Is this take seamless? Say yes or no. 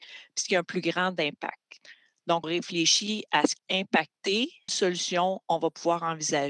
no